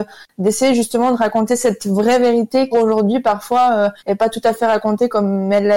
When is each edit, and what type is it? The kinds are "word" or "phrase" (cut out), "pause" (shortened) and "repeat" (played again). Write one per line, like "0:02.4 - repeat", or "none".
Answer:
0:02.7 - phrase
0:04.0 - pause